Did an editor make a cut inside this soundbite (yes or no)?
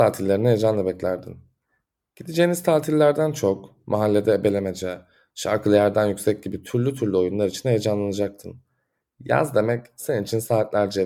no